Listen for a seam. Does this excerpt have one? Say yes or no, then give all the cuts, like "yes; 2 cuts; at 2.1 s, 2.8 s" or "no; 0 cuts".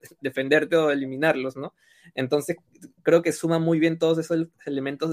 no; 0 cuts